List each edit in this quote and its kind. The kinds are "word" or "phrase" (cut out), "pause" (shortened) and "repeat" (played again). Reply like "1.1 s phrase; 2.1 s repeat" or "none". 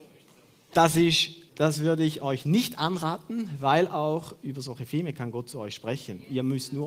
1.5 s pause